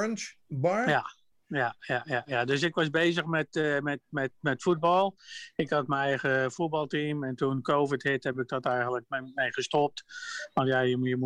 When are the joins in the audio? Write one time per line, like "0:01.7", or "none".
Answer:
none